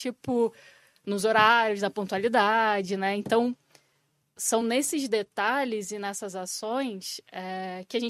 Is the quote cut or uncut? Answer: uncut